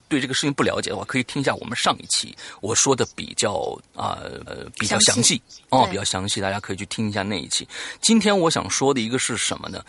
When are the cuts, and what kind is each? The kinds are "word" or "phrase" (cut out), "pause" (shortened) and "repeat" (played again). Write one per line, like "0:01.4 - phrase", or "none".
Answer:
0:04.5 - repeat